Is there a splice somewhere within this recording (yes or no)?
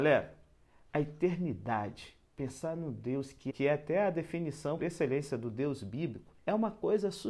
yes